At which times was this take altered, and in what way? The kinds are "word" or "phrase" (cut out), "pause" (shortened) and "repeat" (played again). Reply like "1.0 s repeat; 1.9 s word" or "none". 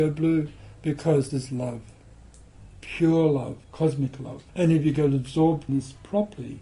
1.3 s word; 3.6 s pause; 4.5 s pause; 5.7 s word